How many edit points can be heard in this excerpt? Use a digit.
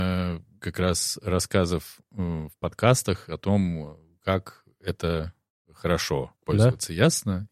1